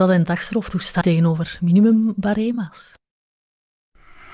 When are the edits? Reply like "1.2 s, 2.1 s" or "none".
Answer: 1.0 s